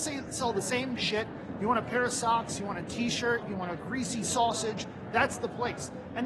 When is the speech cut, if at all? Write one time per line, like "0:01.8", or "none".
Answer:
none